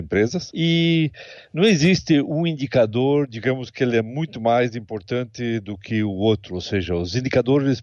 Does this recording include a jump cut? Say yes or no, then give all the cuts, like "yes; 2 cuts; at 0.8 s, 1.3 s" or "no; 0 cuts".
no; 0 cuts